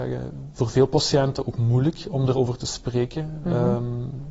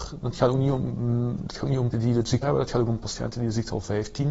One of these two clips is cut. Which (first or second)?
second